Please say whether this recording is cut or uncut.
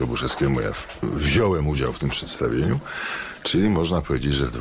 uncut